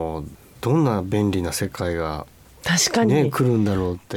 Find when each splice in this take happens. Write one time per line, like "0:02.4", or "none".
0:02.5